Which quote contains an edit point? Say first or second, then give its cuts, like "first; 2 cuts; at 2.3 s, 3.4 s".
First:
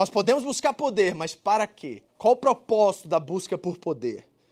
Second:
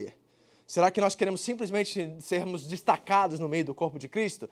first; 1 cut; at 2.1 s